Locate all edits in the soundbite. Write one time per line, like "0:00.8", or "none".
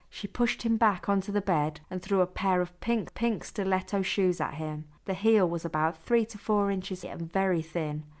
0:01.8
0:03.1
0:05.0
0:07.0

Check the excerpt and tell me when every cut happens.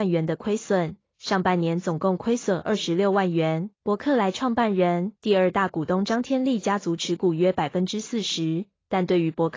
0:03.7
0:05.2

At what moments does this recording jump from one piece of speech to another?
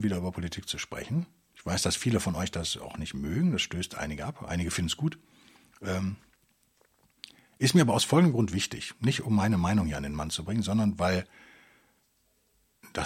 none

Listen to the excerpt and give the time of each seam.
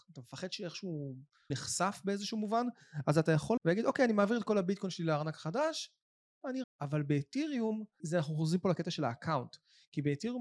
0:01.5
0:03.6
0:06.6
0:08.0

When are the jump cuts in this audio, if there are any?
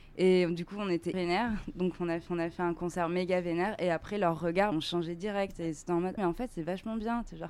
0:01.1
0:02.3
0:04.7
0:06.2

